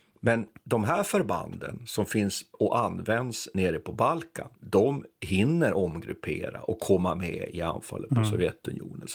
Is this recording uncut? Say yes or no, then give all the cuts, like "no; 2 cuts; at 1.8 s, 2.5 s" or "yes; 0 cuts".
no; 1 cut; at 4.6 s